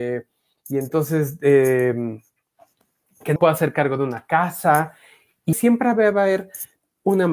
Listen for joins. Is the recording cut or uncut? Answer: cut